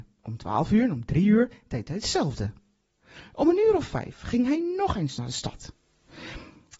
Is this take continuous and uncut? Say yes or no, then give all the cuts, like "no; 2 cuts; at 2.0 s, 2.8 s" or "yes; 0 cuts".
yes; 0 cuts